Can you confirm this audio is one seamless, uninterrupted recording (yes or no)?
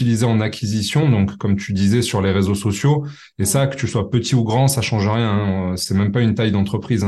yes